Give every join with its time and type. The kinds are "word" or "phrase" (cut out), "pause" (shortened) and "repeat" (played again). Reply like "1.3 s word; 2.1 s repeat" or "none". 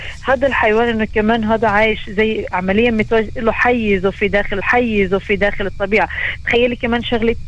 4.6 s repeat